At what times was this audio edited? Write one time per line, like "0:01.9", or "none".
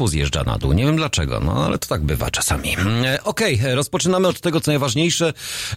0:04.3
0:04.7